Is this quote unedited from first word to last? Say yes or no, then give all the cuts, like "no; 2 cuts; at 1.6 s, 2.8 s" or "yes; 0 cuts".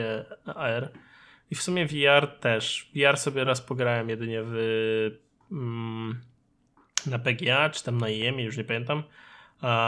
yes; 0 cuts